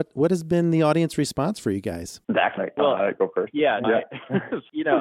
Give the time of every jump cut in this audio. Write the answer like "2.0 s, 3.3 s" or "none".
2.2 s, 2.6 s, 3.8 s